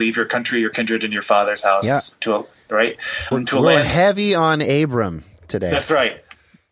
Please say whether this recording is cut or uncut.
cut